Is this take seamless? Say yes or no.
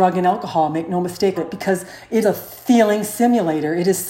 no